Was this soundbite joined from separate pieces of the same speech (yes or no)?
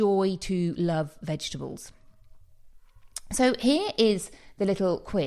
no